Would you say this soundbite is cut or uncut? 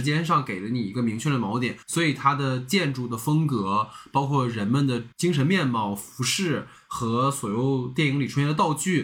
cut